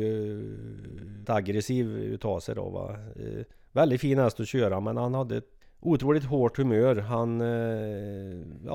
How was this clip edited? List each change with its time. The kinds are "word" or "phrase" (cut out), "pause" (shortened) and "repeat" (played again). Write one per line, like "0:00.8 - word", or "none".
0:01.2 - word
0:05.6 - word